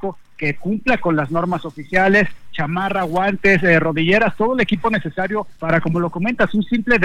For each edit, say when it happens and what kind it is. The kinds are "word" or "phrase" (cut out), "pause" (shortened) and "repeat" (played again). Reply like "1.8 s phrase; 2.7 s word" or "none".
5.6 s pause